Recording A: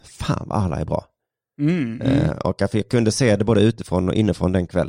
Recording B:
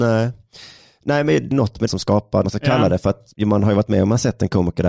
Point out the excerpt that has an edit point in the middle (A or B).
B